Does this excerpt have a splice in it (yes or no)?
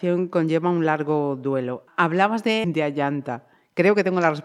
yes